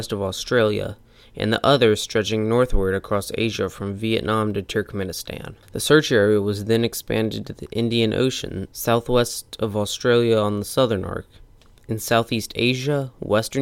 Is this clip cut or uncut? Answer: uncut